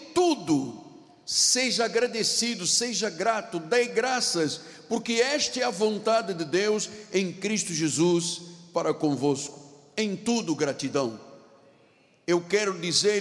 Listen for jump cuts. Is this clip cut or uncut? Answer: uncut